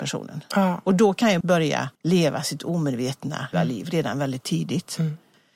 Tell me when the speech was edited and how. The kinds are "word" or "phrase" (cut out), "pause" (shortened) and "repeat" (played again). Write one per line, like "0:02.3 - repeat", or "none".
0:01.4 - word
0:01.9 - pause
0:02.6 - word
0:03.5 - phrase

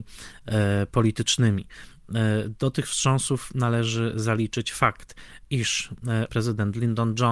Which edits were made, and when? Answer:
0:06.3 - word

